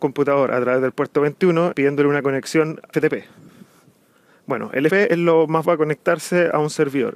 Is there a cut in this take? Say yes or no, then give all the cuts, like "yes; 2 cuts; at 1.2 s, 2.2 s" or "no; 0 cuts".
yes; 4 cuts; at 1.7 s, 2.9 s, 4.9 s, 5.6 s